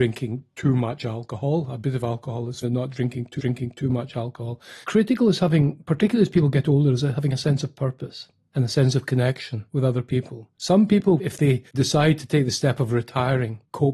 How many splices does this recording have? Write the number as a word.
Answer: five